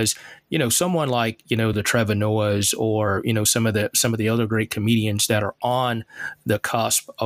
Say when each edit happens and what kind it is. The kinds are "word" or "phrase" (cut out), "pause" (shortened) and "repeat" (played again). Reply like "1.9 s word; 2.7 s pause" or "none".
none

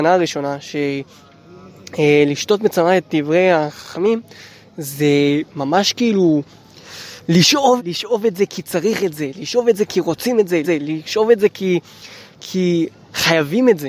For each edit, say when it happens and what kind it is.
3.0 s word; 7.8 s phrase; 10.6 s repeat

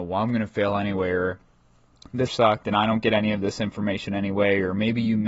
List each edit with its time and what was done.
2.3 s word

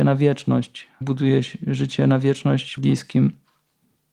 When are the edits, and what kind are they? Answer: 1.0 s word; 2.8 s word

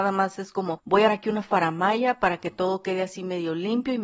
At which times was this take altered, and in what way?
1.1 s word

